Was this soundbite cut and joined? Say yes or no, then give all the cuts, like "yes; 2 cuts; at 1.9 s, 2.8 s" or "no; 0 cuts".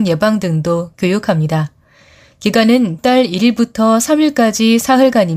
yes; 1 cut; at 3.0 s